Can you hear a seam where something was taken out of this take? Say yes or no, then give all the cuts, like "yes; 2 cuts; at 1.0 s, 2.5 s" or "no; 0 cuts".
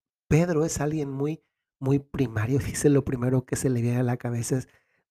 no; 0 cuts